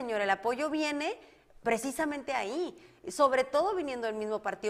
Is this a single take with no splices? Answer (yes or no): yes